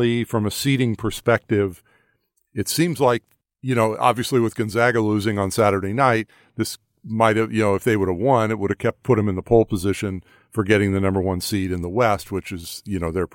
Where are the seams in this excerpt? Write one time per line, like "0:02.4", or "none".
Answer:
none